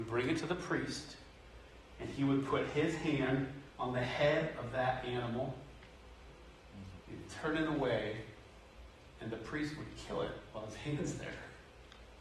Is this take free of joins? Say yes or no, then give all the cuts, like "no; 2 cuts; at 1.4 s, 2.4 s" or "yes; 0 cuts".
no; 2 cuts; at 3.7 s, 7.0 s